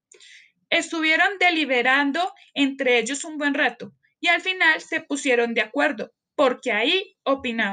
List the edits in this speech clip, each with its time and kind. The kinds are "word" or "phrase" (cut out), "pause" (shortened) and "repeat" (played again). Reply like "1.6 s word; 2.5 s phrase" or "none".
none

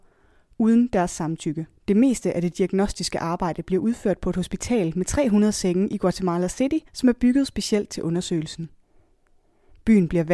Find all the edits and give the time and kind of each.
1.8 s pause; 6.9 s pause

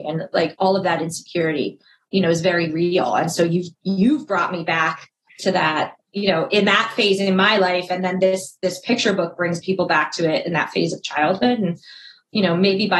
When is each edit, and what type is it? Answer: none

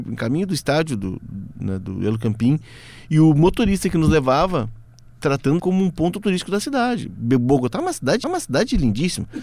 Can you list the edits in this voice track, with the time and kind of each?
5.6 s word; 8.2 s repeat

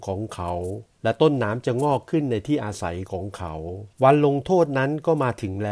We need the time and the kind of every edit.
0.9 s pause; 3.9 s pause

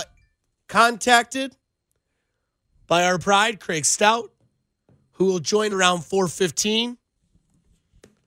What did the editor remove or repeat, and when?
3.2 s phrase; 5.7 s word

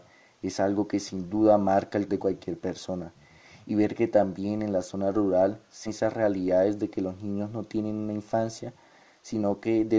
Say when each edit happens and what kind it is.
2.1 s word; 5.9 s word

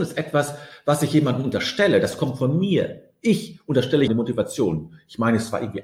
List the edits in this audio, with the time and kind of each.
4.1 s word

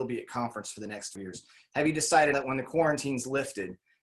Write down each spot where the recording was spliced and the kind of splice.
1.2 s word; 2.3 s word

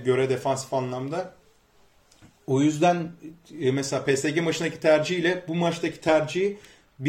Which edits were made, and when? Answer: none

